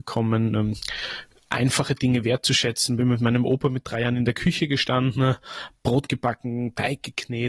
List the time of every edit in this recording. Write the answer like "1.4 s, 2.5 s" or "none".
none